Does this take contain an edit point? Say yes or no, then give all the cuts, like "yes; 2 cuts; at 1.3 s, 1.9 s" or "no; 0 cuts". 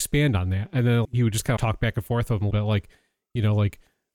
yes; 3 cuts; at 1.0 s, 1.6 s, 2.5 s